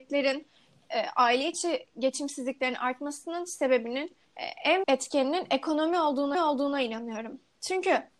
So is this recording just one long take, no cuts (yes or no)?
no